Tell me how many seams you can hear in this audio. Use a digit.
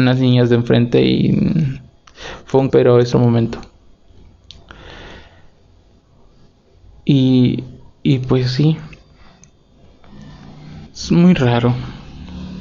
3